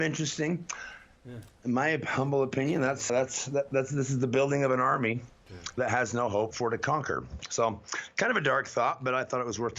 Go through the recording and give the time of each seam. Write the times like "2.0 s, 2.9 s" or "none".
3.1 s, 6.5 s